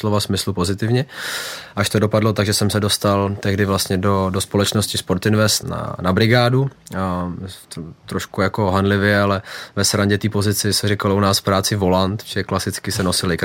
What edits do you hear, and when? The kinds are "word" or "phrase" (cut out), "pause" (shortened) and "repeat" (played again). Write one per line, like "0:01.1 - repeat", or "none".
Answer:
0:05.6 - word